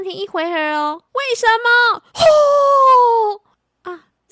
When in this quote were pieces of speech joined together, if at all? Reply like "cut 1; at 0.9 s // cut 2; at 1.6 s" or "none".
cut 1; at 1.1 s // cut 2; at 2.1 s